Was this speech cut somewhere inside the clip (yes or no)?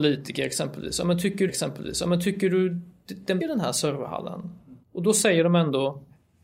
yes